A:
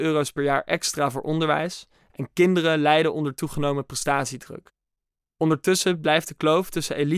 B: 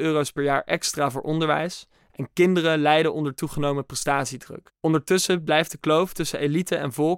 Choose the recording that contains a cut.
B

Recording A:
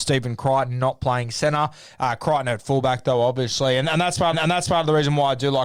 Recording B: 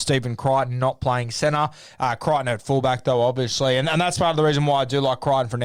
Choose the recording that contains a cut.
A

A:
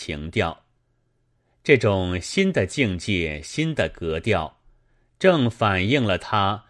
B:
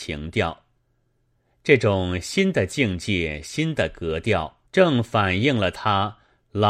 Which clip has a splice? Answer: B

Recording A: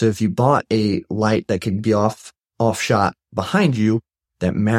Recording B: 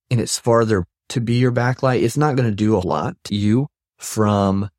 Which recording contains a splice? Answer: B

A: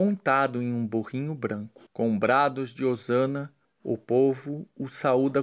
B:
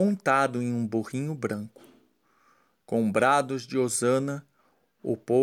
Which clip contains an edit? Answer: A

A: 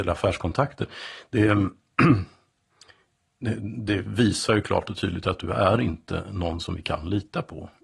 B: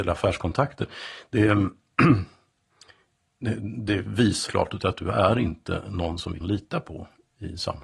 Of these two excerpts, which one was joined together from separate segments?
B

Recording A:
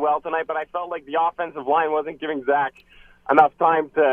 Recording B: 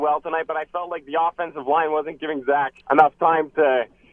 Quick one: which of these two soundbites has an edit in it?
B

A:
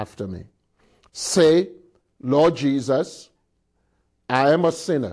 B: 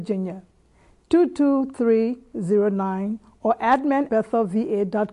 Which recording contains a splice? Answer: B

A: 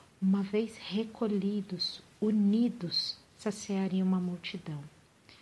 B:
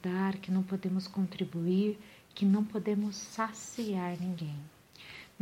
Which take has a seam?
A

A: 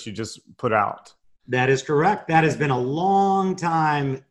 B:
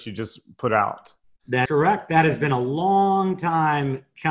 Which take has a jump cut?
B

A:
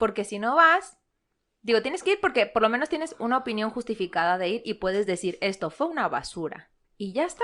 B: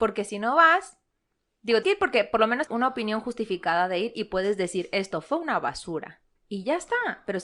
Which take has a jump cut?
B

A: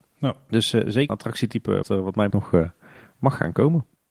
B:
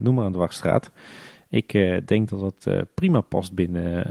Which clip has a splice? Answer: A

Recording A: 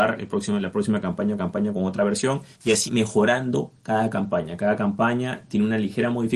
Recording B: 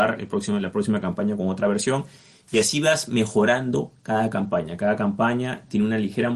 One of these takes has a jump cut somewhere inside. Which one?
A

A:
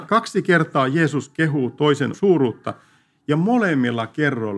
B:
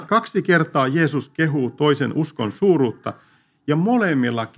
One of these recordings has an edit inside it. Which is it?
A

